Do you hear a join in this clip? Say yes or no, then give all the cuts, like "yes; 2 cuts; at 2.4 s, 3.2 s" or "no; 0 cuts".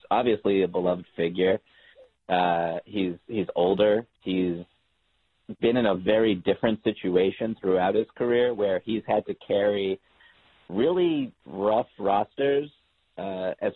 no; 0 cuts